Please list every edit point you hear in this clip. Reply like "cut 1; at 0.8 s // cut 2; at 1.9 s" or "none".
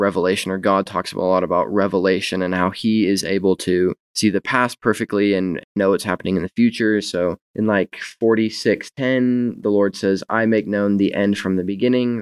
cut 1; at 5.7 s // cut 2; at 7.4 s